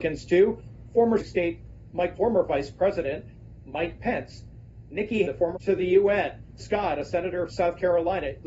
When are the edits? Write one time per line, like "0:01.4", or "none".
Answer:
0:01.2
0:02.1
0:05.2
0:05.5
0:06.6
0:07.5